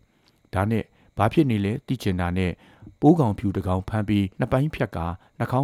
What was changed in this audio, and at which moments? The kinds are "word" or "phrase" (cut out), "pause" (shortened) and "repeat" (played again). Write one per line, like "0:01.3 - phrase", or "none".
0:04.3 - pause